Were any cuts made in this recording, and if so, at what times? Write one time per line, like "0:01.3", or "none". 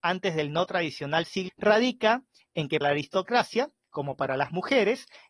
0:01.5
0:02.8